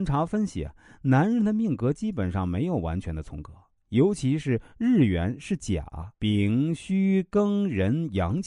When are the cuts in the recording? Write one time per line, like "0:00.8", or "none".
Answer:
0:06.1